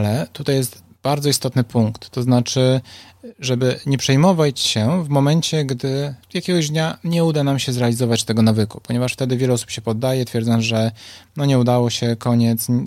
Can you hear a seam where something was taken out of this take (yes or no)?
yes